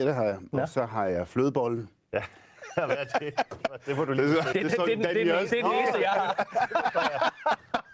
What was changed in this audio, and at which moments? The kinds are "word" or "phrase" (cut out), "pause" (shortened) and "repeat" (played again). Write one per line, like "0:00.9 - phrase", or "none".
0:04.5 - word
0:05.5 - word